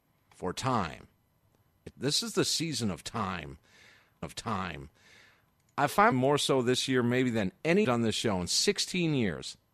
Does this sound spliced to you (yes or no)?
yes